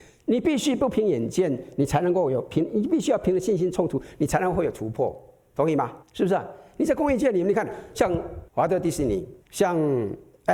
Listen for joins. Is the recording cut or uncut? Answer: cut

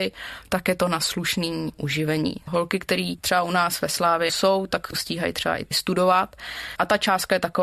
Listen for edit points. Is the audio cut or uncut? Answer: cut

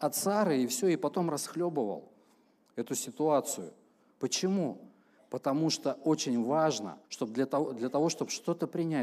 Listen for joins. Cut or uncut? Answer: cut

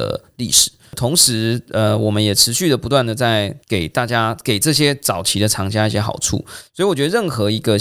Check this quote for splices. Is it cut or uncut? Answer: cut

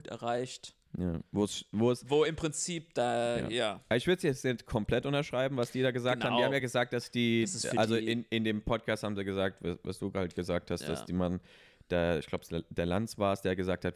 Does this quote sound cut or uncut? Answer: uncut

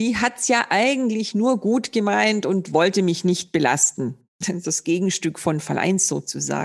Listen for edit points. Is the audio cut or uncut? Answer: cut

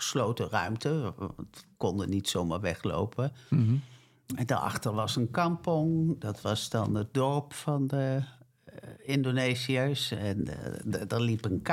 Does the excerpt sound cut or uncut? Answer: uncut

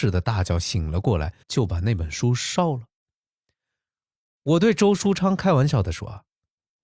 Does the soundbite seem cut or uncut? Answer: cut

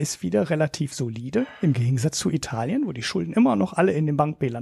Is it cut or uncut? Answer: uncut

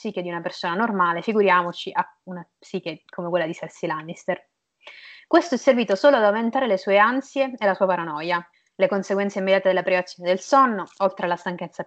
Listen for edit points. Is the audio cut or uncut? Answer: cut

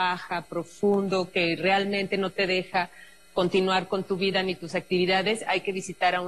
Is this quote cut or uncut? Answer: uncut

